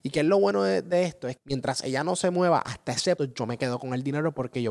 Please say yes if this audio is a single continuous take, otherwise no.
no